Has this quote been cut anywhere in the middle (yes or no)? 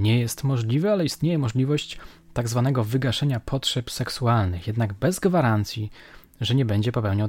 no